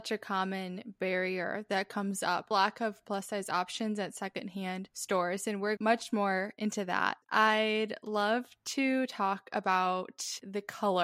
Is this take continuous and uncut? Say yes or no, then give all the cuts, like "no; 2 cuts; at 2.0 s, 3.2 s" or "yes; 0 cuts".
no; 3 cuts; at 2.5 s, 5.8 s, 7.2 s